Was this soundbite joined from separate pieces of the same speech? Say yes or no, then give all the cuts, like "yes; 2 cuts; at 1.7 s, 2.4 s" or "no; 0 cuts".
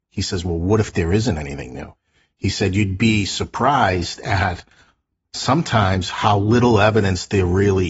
no; 0 cuts